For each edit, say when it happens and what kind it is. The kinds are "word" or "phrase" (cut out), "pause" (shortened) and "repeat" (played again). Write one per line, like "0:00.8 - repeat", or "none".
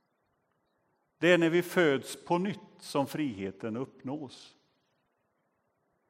none